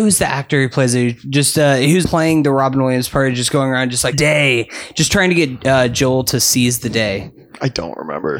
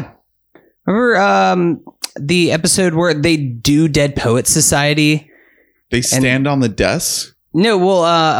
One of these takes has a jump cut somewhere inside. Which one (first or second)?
first